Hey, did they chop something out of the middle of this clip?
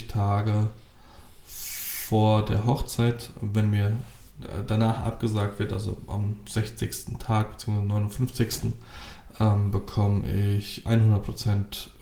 no; 0 cuts

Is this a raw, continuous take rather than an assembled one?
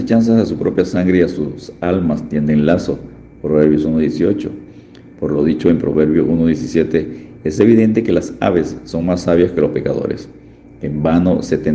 yes; 0 cuts

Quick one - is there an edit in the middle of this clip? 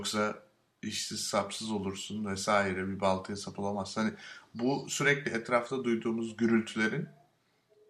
no; 0 cuts

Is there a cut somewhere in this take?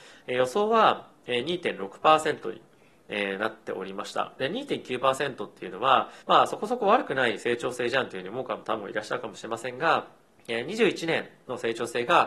yes; 2 cuts; at 6.2 s, 10.3 s

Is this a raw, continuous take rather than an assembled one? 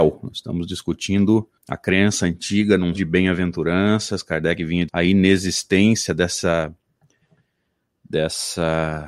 no; 3 cuts; at 1.6 s, 2.9 s, 4.9 s

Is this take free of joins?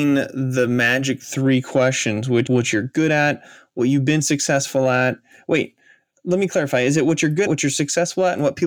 no; 2 cuts; at 2.5 s, 7.5 s

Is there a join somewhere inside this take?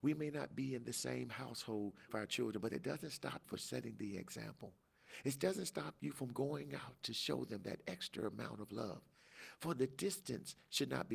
yes; 2 cuts; at 2.1 s, 3.4 s

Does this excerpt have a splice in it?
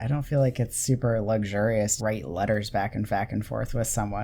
yes; 2 cuts; at 2.0 s, 3.1 s

